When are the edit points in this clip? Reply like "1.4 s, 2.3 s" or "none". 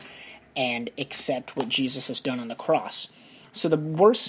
none